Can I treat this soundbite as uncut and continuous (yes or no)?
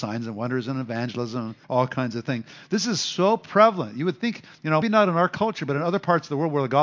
no